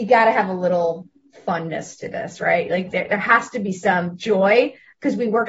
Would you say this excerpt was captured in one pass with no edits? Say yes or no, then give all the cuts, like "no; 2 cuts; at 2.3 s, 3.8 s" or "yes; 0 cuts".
yes; 0 cuts